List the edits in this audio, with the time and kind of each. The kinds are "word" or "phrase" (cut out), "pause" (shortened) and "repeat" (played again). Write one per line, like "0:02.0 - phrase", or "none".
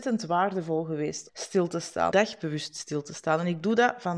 0:01.3 - word
0:02.1 - phrase

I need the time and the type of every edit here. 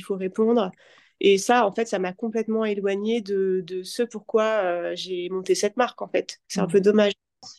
0:06.4 - pause

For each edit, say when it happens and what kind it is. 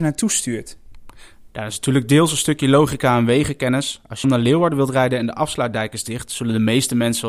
0:04.2 - phrase

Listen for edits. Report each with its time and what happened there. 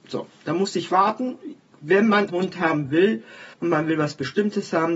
0:02.3 - word
0:03.5 - pause

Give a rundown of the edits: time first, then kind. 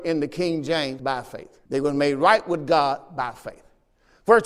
0:01.0 - word
0:01.7 - pause

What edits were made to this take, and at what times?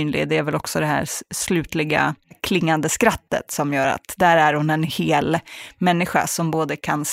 none

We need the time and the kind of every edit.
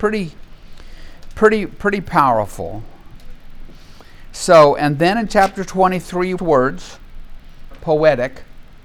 0:06.4 - phrase
0:07.7 - phrase

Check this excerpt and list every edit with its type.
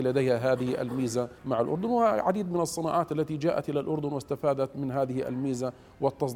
0:01.4 - pause

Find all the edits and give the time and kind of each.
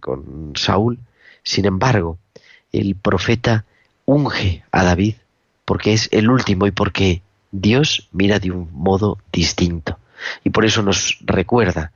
none

